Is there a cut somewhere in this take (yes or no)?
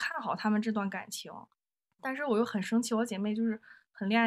no